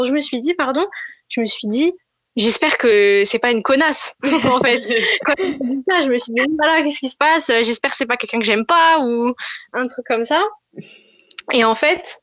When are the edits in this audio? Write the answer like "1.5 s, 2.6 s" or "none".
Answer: none